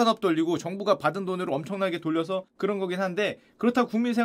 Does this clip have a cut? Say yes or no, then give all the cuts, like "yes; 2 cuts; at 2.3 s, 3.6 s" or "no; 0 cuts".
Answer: no; 0 cuts